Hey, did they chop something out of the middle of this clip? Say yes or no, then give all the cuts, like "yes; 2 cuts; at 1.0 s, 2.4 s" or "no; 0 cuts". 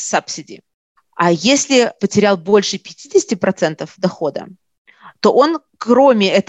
yes; 1 cut; at 2.0 s